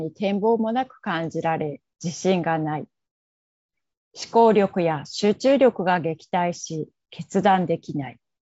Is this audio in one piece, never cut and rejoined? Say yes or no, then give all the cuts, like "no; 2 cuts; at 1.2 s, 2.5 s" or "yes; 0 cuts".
yes; 0 cuts